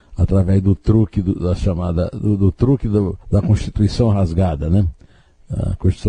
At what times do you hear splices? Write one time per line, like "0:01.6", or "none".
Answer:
0:03.2